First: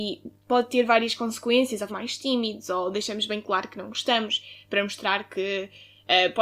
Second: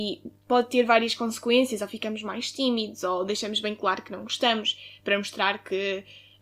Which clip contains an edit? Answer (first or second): first